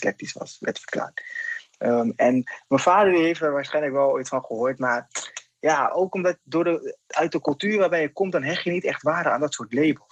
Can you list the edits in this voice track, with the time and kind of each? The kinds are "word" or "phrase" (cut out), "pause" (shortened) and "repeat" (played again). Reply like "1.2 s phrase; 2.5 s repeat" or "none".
6.1 s word